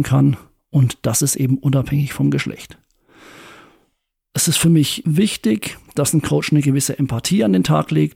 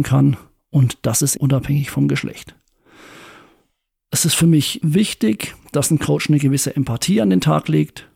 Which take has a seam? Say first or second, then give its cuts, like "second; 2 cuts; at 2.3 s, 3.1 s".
second; 1 cut; at 1.4 s